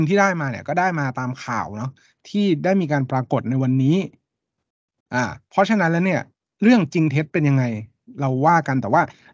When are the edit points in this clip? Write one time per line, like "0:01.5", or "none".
none